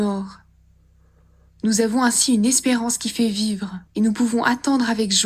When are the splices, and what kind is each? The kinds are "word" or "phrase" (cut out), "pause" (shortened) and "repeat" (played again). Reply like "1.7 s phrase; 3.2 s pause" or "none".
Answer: 3.9 s pause

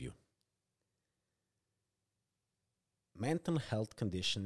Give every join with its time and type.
none

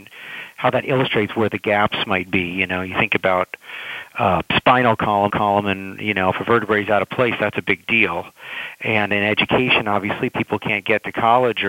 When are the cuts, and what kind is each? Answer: 5.3 s repeat

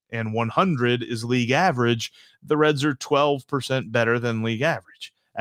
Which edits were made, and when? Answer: none

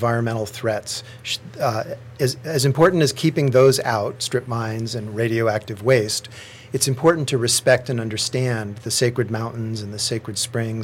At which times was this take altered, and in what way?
none

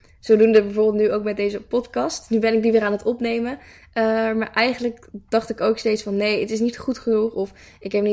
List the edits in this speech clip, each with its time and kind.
none

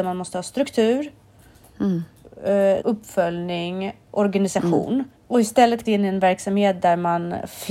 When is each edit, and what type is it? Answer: 2.8 s word; 5.2 s pause; 5.8 s word

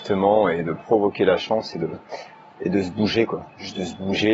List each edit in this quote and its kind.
none

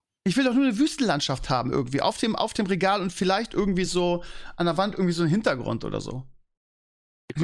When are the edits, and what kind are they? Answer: none

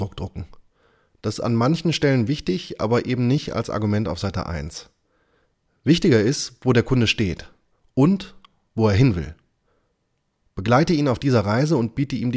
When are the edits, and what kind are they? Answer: none

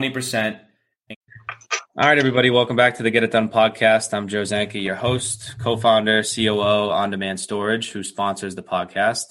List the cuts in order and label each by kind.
6.9 s word

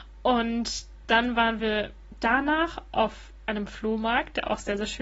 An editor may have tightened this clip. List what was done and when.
none

